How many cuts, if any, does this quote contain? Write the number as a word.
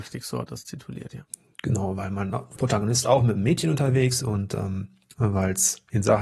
two